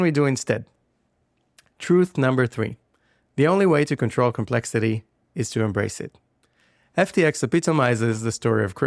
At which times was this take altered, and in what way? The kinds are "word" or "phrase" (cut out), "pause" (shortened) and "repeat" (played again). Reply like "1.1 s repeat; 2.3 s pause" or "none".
none